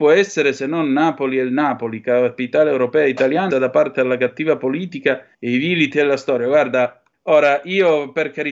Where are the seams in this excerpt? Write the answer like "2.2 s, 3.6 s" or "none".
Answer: 3.5 s, 5.3 s, 5.9 s, 7.1 s